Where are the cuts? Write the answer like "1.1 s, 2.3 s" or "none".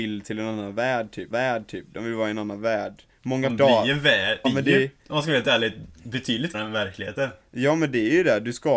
1.3 s, 3.1 s, 3.5 s, 4.4 s, 5.0 s, 6.5 s

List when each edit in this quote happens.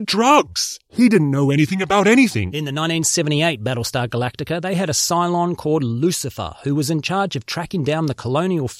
none

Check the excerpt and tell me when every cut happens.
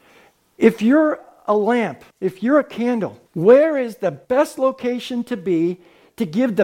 2.1 s, 3.3 s, 4.2 s

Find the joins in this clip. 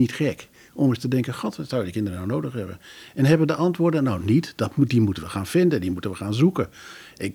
none

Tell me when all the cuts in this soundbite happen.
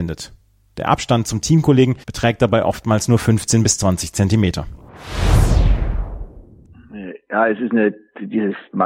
2.0 s

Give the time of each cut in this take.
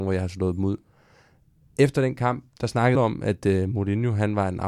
2.5 s, 2.9 s

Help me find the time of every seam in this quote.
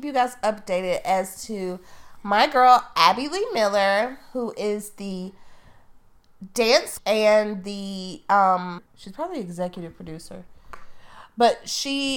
7.0 s, 8.9 s

